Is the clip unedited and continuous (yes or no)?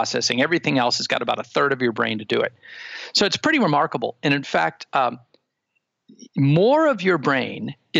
no